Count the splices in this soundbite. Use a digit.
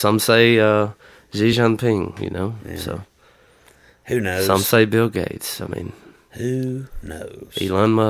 0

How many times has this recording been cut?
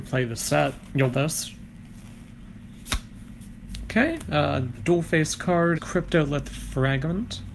2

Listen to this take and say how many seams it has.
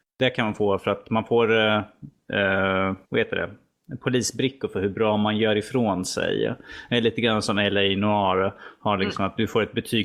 1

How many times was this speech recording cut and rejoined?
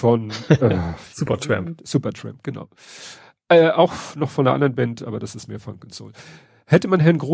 0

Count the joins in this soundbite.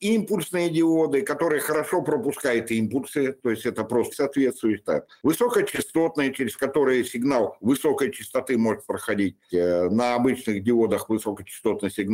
1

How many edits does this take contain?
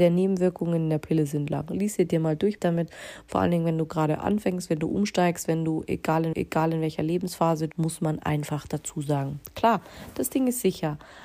3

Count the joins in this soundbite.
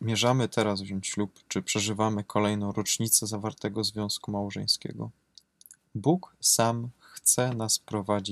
0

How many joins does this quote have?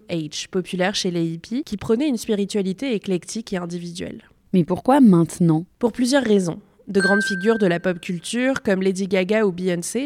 0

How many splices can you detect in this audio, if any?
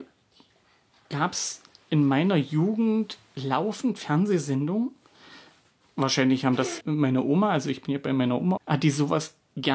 2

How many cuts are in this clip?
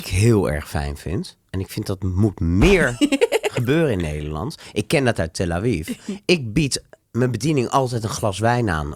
1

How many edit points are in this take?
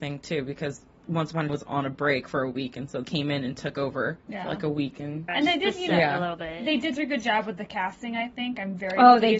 5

